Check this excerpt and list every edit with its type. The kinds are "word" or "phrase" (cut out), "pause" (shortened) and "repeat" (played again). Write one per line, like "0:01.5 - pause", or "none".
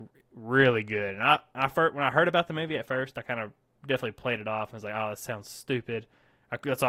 none

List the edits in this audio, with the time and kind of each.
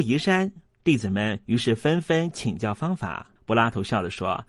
0:03.4 - pause

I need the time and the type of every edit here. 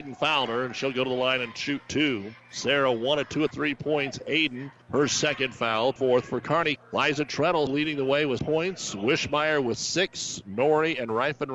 0:02.4 - pause
0:03.5 - phrase
0:04.8 - pause
0:06.0 - word
0:06.8 - word
0:07.7 - word
0:08.4 - word

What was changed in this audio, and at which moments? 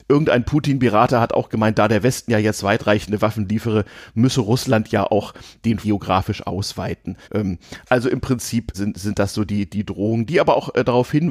0:05.8 - phrase
0:07.2 - pause
0:08.7 - word

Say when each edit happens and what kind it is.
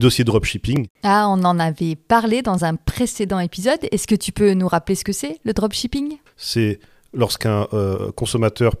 none

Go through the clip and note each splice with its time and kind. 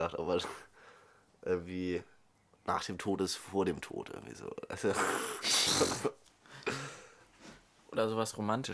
0:02.4 - pause
0:06.3 - pause

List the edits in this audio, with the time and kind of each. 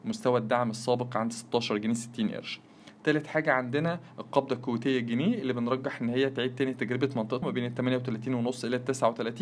0:07.4 - word

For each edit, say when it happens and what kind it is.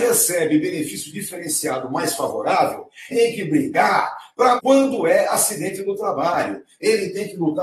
0:03.1 - word
0:04.6 - word

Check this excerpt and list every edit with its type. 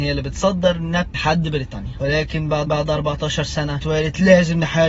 0:01.1 - word
0:02.7 - repeat
0:03.8 - phrase

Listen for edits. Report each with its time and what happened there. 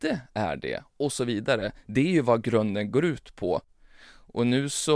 none

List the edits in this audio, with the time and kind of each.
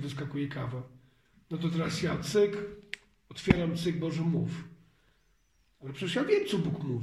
none

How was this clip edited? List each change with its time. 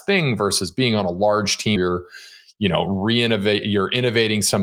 0:01.8 - word

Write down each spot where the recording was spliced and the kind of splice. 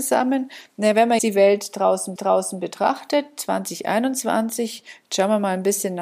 0:01.2 - word
0:02.2 - repeat

